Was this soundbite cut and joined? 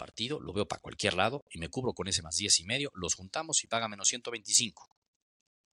no; 0 cuts

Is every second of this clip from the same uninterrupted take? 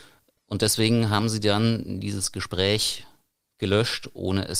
yes; 0 cuts

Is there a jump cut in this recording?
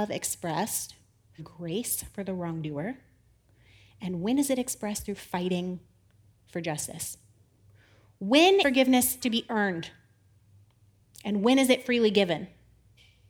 yes; 3 cuts; at 1.4 s, 8.6 s, 9.2 s

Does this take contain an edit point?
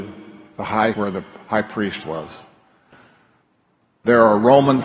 yes; 2 cuts; at 0.9 s, 2.0 s

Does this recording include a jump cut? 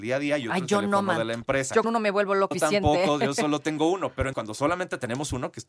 yes; 3 cuts; at 1.8 s, 2.5 s, 4.3 s

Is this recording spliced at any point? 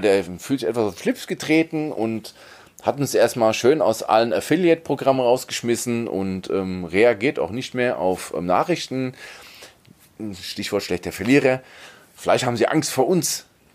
no; 0 cuts

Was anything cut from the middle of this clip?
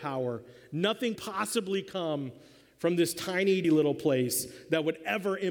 yes; 2 cuts; at 1.2 s, 3.6 s

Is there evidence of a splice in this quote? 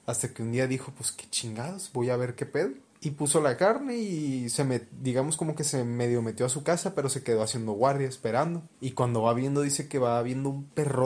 yes; 2 cuts; at 2.9 s, 8.7 s

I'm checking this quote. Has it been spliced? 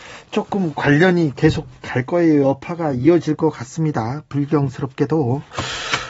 no; 0 cuts

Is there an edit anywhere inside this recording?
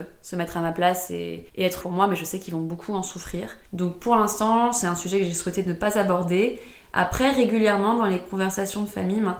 yes; 3 cuts; at 1.5 s, 1.8 s, 3.7 s

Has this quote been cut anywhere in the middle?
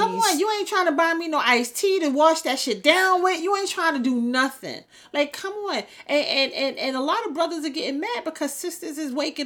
no; 0 cuts

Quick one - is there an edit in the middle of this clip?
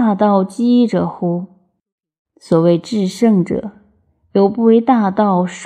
no; 0 cuts

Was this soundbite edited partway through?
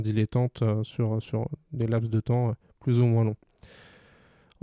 no; 0 cuts

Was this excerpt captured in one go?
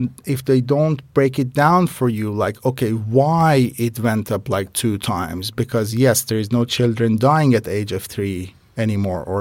yes; 0 cuts

